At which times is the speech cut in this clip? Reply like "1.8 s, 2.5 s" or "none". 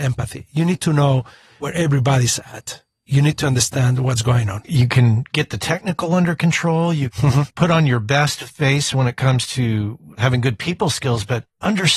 none